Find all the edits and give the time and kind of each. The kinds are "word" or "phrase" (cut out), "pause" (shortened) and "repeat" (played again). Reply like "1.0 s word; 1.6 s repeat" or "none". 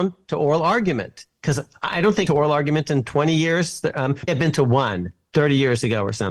2.3 s phrase; 4.3 s word